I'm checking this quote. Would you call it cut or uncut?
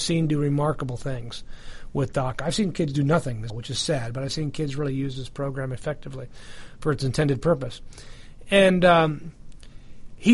cut